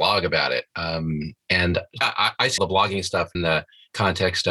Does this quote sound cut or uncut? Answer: cut